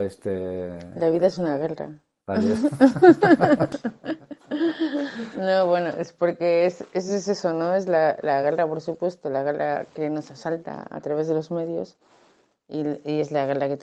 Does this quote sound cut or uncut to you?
uncut